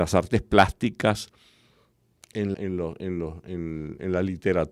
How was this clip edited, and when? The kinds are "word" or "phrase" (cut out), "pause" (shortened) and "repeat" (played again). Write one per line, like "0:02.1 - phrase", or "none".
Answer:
0:02.5 - word